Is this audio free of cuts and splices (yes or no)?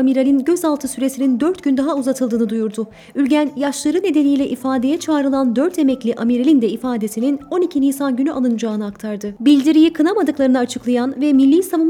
yes